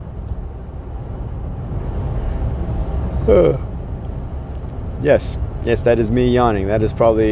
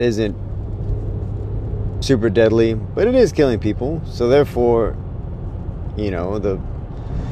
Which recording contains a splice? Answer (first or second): second